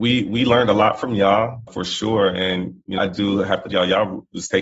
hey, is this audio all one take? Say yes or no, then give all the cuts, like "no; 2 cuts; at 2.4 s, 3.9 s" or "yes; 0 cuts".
no; 3 cuts; at 1.7 s, 3.0 s, 3.7 s